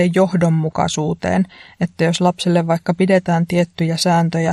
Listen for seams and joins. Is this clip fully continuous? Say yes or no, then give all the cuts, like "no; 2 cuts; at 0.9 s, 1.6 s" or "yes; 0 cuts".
yes; 0 cuts